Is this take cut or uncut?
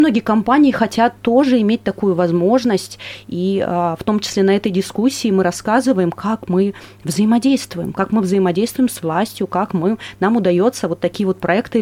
uncut